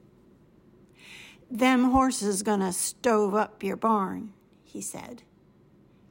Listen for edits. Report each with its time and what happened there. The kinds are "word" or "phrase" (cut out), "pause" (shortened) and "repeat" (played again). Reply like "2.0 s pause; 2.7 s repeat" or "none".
none